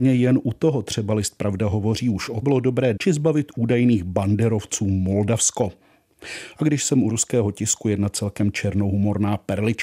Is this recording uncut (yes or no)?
no